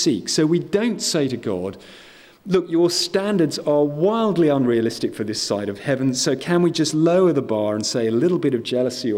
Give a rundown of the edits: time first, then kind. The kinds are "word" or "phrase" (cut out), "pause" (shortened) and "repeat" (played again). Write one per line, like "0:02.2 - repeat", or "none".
none